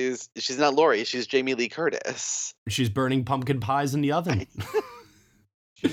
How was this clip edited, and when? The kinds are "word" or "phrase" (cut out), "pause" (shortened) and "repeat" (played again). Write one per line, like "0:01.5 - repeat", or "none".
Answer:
none